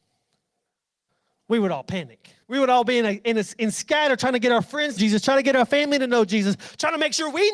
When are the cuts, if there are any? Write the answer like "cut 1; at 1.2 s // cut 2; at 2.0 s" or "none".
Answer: cut 1; at 2.4 s // cut 2; at 5.0 s